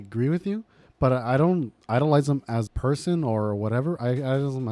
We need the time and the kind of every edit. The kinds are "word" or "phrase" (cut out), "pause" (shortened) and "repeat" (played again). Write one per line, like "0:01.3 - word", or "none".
0:02.7 - word